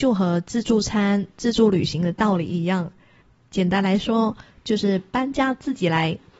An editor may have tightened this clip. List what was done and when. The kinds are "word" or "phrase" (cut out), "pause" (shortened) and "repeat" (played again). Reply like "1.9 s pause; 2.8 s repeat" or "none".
none